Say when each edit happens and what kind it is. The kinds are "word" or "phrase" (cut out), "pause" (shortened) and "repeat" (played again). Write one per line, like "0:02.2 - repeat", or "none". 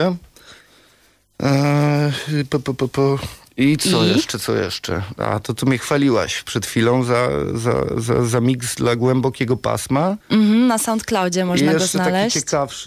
0:03.5 - pause
0:10.2 - pause

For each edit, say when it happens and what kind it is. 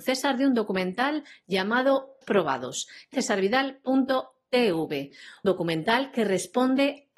0:02.2 - word
0:03.1 - phrase
0:05.4 - word

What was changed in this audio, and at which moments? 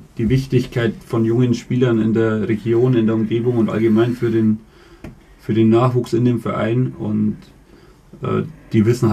none

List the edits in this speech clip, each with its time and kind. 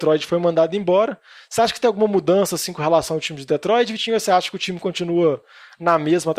none

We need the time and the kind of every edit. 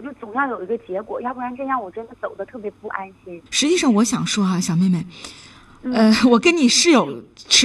0:03.5 - pause

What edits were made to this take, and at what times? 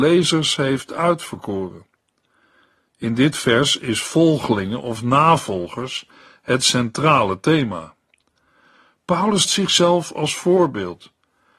0:09.4 - word

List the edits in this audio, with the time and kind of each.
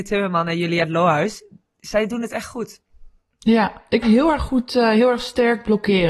0:04.0 - phrase

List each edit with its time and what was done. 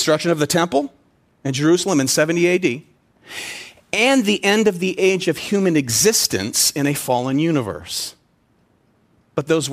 none

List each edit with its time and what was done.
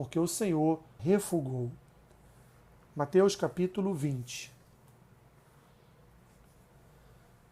0:01.0 - word

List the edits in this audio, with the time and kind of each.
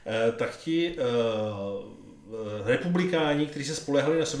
none

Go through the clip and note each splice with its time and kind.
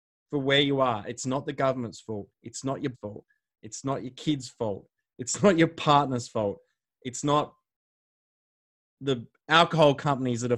0:02.3 - pause
0:02.9 - word

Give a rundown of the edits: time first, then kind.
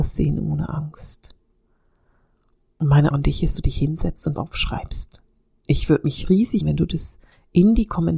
0:03.1 - word
0:03.6 - word
0:04.4 - word
0:06.6 - word

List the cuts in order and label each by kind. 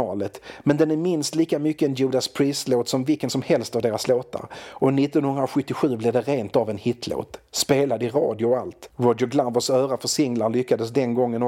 none

